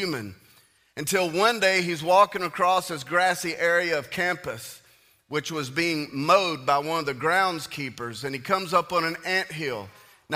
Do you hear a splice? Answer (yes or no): no